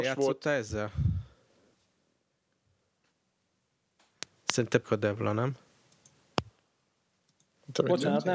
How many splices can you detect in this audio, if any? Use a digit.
1